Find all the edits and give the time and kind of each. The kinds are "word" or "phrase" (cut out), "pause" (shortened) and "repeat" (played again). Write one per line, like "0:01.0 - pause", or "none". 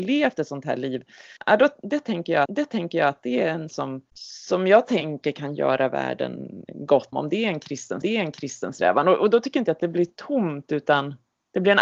0:01.4 - pause
0:02.4 - repeat
0:03.7 - word
0:04.1 - pause
0:07.1 - word
0:08.0 - repeat